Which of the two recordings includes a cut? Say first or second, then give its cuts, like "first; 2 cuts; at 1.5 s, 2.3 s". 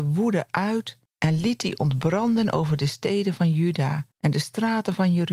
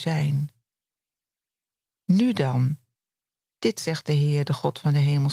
first; 2 cuts; at 1.1 s, 4.1 s